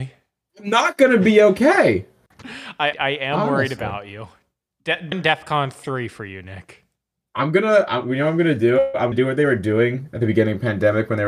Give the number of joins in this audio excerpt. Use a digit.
3